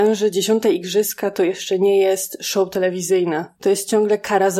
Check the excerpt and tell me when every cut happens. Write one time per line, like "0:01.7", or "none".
none